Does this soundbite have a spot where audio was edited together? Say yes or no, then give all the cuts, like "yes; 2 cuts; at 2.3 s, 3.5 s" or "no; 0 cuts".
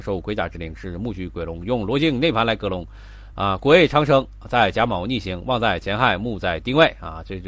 no; 0 cuts